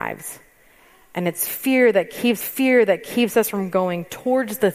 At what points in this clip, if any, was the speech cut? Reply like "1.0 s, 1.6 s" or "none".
2.4 s

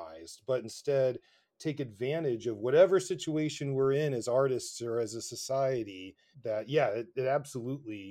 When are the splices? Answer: none

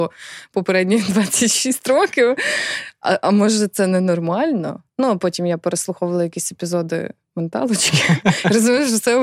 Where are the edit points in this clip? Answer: 4.9 s

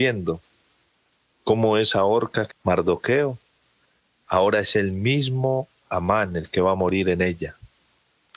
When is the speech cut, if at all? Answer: 2.5 s

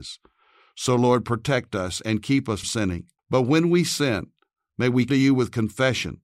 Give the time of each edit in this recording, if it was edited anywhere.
2.6 s, 3.2 s, 5.1 s

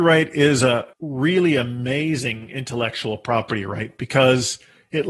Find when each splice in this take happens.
0.9 s

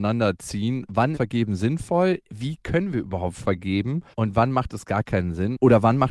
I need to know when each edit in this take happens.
1.1 s, 4.1 s

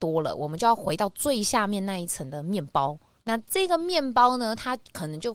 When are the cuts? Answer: 3.2 s

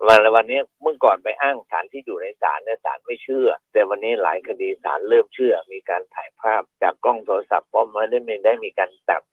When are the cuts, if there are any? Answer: 3.6 s, 6.7 s

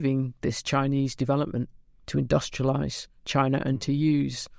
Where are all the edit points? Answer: 2.0 s

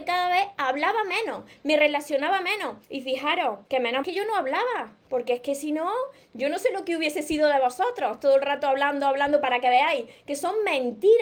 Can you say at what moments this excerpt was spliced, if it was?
2.8 s, 3.7 s, 4.0 s

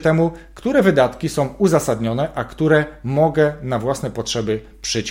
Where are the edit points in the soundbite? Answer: none

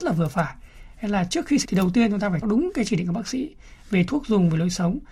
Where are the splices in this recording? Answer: 1.6 s, 2.4 s

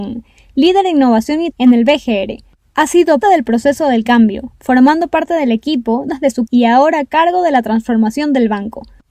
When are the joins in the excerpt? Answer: 1.5 s, 3.2 s, 6.1 s, 6.5 s

